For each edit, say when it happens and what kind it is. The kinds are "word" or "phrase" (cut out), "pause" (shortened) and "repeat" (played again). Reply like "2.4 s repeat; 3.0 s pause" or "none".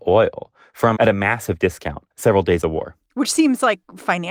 1.0 s word; 2.1 s pause; 2.6 s word